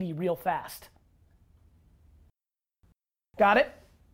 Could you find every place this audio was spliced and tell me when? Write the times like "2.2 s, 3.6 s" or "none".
none